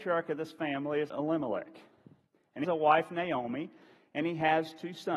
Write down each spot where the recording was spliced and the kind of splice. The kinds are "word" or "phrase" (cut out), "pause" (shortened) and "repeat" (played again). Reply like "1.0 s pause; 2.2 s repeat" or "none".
1.1 s word; 2.6 s word